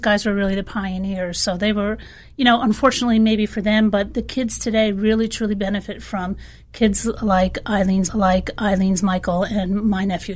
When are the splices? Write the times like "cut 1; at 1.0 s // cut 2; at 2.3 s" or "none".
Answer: cut 1; at 8.1 s